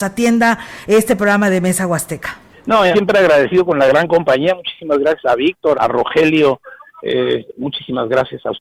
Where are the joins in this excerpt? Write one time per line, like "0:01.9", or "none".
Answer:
0:02.5
0:02.9
0:05.7

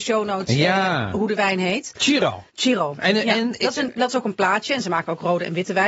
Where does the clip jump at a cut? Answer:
0:02.5

